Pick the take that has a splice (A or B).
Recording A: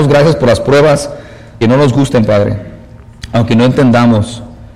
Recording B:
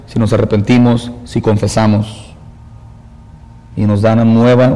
A